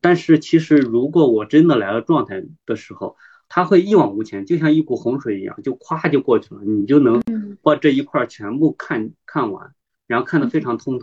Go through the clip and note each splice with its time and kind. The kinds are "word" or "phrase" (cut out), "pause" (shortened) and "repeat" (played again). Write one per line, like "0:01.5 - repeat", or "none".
0:02.6 - pause